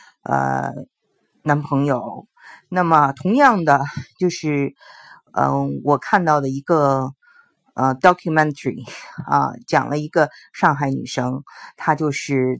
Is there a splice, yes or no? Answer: no